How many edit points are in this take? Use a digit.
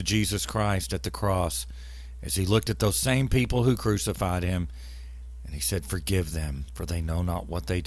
0